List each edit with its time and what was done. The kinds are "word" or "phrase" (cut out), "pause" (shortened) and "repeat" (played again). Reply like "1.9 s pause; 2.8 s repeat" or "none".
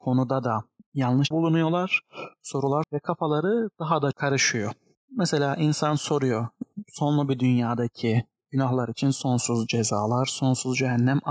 1.3 s word; 2.8 s word; 4.1 s word

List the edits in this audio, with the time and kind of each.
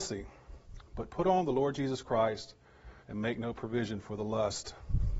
3.0 s pause

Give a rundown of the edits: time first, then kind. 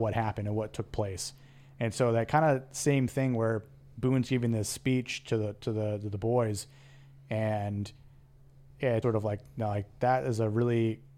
9.0 s word

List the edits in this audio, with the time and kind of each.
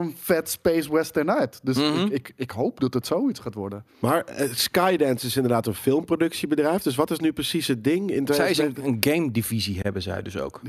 3.9 s pause

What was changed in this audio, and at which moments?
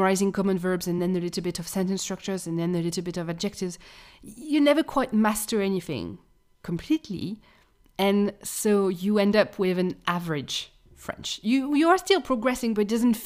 none

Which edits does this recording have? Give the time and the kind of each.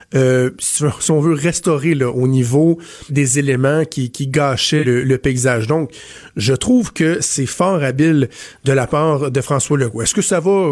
3.1 s word; 4.1 s word; 4.8 s word

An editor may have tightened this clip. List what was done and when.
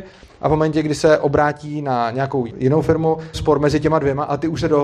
2.5 s word; 3.3 s phrase

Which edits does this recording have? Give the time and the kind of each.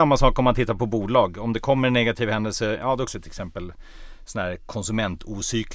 3.1 s word

